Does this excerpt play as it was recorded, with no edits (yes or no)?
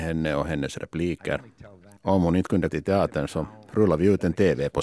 no